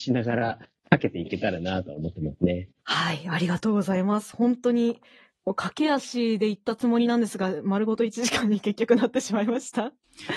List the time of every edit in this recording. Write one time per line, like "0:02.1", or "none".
0:02.8